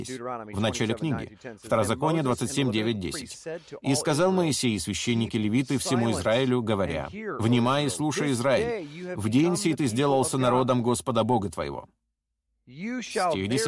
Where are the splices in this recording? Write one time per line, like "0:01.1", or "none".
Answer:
none